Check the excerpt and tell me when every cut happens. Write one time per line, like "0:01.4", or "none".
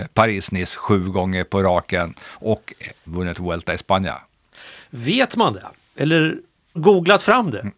0:03.1
0:06.8